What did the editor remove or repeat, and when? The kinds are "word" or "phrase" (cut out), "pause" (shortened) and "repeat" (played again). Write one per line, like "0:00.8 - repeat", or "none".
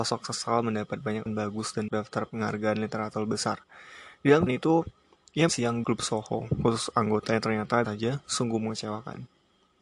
0:01.3 - word
0:01.9 - word
0:02.3 - word
0:04.5 - word
0:05.5 - word
0:05.8 - word
0:07.8 - word